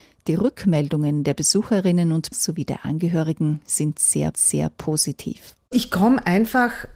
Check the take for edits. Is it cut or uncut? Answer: cut